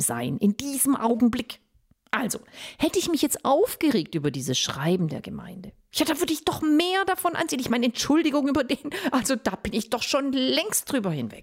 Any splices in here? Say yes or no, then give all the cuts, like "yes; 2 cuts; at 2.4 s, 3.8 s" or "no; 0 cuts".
no; 0 cuts